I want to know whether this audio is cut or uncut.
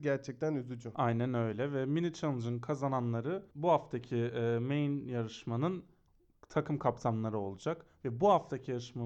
cut